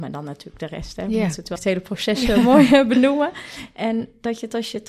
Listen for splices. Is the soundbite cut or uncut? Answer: cut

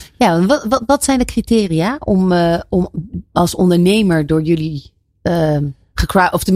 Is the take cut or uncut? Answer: uncut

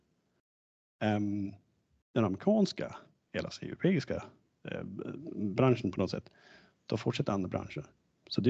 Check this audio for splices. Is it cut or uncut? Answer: uncut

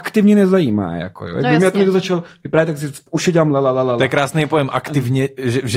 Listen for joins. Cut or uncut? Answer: uncut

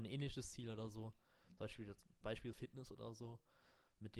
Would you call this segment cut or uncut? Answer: cut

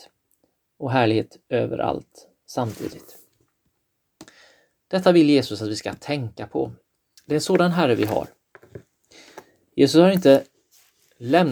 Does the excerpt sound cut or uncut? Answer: uncut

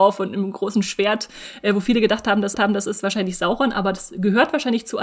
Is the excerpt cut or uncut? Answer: cut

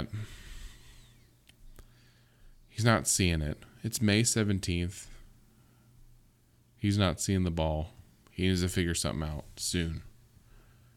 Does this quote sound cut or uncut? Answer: uncut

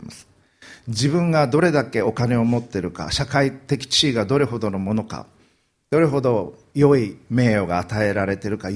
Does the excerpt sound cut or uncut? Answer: uncut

